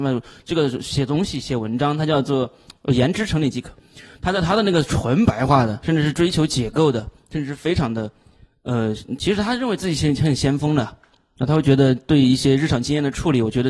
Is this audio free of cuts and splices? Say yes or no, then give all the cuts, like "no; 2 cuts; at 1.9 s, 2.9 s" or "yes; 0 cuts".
yes; 0 cuts